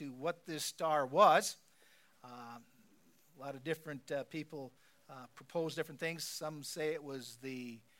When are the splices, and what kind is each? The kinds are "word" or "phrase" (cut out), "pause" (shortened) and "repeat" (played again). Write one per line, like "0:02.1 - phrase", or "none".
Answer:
none